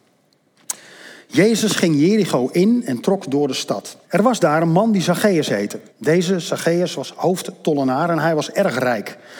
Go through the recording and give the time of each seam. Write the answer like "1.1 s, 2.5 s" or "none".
4.0 s, 5.9 s